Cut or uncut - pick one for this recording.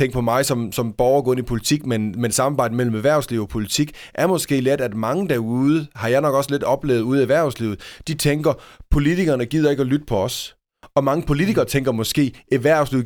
uncut